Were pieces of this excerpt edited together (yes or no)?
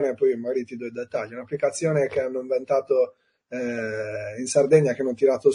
no